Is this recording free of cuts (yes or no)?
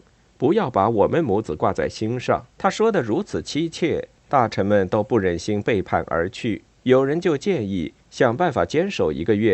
no